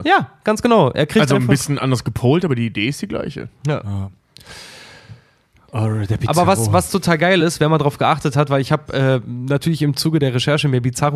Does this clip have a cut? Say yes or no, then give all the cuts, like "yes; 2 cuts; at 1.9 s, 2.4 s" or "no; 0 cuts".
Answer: no; 0 cuts